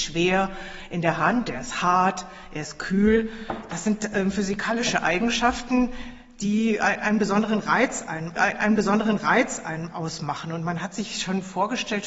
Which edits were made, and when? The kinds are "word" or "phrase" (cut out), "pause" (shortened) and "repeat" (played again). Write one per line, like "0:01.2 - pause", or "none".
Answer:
0:08.4 - repeat